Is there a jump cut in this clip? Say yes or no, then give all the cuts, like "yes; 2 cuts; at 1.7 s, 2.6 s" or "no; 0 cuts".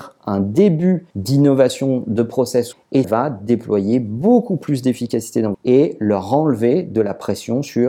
yes; 4 cuts; at 1.1 s, 2.7 s, 3.0 s, 5.5 s